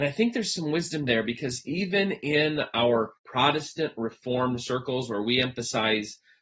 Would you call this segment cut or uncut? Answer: cut